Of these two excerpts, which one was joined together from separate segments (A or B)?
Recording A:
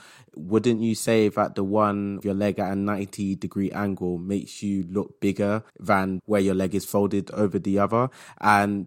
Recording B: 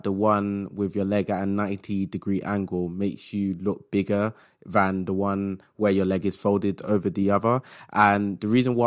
A